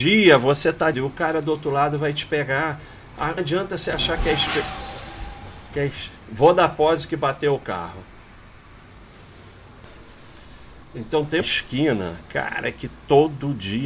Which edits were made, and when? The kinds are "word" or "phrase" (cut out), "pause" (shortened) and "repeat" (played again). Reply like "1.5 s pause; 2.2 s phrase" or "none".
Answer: 0.9 s word; 3.4 s word; 11.4 s word